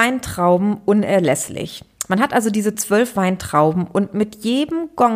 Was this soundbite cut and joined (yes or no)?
no